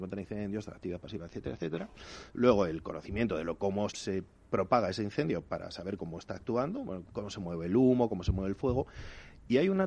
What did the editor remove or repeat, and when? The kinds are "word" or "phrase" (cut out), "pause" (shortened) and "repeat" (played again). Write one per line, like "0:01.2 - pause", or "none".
0:03.9 - word
0:07.1 - word

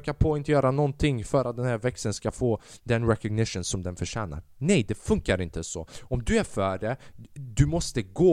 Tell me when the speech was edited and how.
none

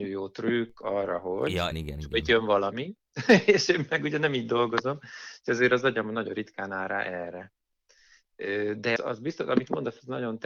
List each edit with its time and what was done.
0:01.7 - word
0:09.0 - word

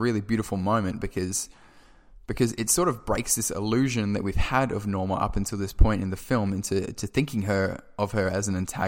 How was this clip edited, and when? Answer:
0:02.2 - pause

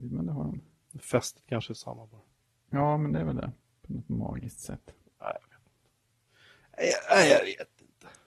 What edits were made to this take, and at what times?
none

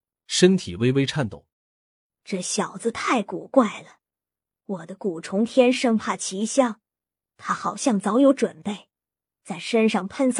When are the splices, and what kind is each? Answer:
0:01.5 - pause

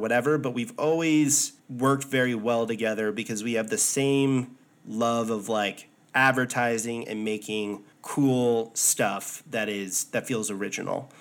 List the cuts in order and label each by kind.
0:01.6 - pause
0:07.9 - pause

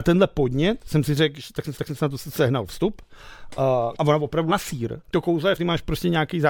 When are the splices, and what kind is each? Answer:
0:01.7 - repeat
0:03.9 - phrase
0:04.5 - word
0:05.0 - pause
0:05.6 - phrase

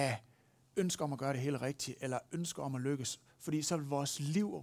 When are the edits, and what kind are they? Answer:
none

